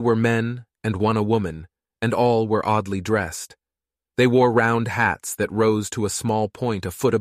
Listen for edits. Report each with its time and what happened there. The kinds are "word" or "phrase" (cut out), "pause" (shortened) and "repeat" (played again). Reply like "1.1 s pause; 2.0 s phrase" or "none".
none